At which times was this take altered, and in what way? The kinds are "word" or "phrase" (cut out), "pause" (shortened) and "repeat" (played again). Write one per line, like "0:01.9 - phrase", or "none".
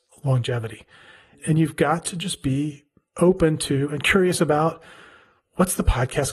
none

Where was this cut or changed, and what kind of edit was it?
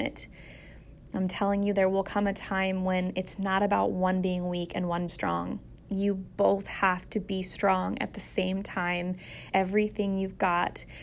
0:05.1 - word
0:09.5 - phrase

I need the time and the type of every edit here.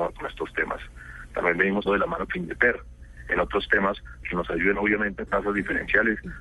0:01.8 - word
0:02.3 - word
0:04.2 - word
0:05.3 - word

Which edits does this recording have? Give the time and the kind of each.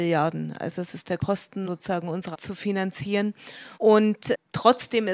0:01.2 - word
0:01.6 - word
0:02.3 - word
0:03.7 - pause

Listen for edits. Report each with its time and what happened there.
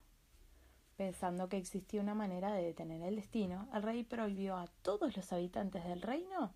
none

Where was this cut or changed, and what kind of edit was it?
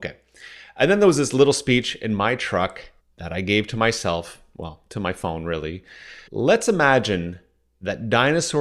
0:03.0 - pause
0:06.3 - pause

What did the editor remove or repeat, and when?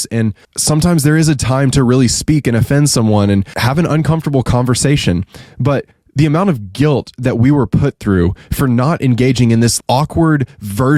0:09.8 - word

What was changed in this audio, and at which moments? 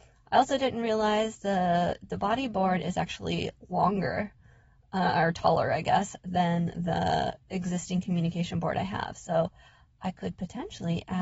none

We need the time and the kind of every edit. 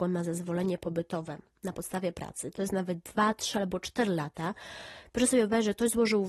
none

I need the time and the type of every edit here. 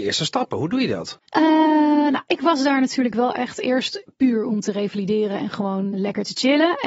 0:05.9 - word

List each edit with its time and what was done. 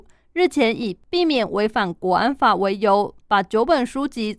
0:03.2 - pause

